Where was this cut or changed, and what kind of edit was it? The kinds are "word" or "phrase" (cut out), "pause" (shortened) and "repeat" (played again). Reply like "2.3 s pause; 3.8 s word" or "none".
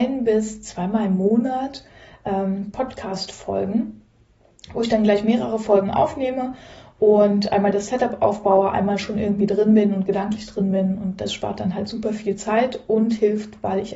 none